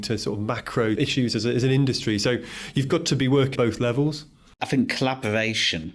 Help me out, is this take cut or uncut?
cut